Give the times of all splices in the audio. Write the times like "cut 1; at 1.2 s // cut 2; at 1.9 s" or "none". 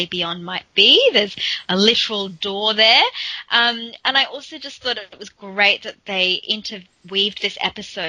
none